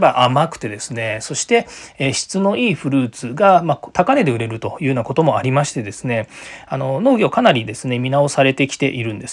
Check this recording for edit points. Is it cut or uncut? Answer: uncut